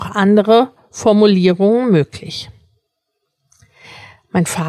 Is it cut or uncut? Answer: uncut